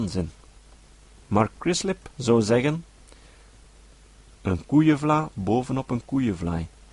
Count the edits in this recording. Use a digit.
1